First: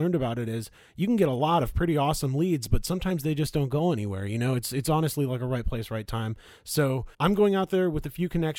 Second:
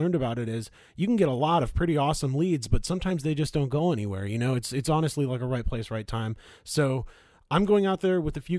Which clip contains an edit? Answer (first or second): first